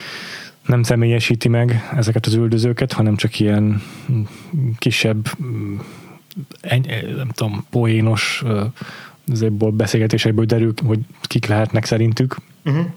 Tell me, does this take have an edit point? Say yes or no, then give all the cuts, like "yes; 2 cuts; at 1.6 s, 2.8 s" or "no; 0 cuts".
yes; 1 cut; at 10.8 s